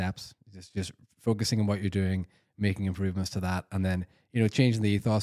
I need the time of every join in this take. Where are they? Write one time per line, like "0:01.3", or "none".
none